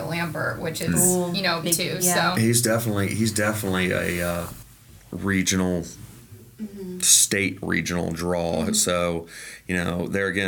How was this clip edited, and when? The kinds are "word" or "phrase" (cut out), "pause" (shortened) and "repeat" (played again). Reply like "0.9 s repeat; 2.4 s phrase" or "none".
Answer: 1.6 s phrase